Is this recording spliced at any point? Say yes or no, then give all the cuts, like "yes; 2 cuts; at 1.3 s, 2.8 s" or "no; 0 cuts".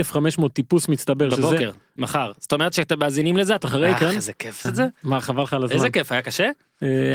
yes; 3 cuts; at 2.0 s, 3.6 s, 4.6 s